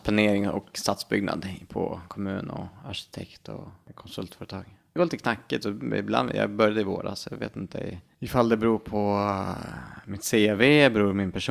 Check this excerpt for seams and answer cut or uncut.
uncut